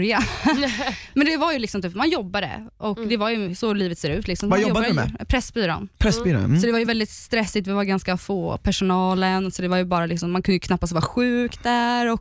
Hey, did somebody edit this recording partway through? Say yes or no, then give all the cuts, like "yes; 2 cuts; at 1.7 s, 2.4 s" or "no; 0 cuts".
no; 0 cuts